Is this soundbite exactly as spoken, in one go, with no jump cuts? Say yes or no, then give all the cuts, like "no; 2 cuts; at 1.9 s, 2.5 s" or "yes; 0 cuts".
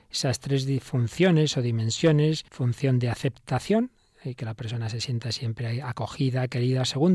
no; 1 cut; at 2.5 s